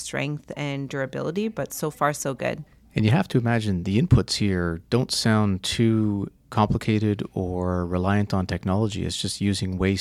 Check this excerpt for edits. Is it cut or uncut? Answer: uncut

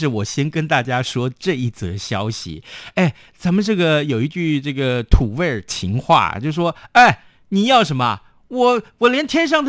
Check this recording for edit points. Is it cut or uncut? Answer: uncut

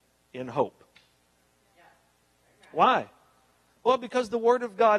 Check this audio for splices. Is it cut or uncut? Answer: uncut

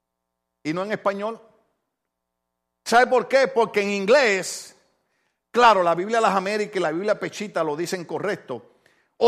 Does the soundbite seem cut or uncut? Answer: uncut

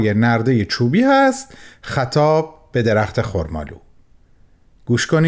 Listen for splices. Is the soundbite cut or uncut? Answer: uncut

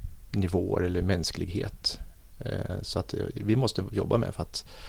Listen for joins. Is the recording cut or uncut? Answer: uncut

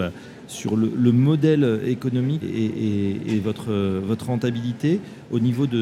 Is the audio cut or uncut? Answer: cut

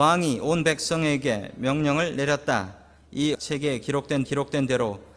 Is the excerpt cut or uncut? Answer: cut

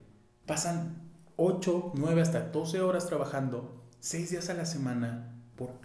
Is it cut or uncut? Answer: uncut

